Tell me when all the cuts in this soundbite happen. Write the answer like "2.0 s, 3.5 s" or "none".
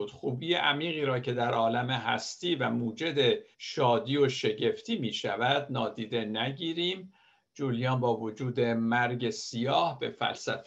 3.5 s